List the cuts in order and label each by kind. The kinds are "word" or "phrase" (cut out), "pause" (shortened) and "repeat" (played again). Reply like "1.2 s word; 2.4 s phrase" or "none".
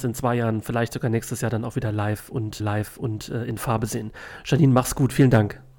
2.6 s repeat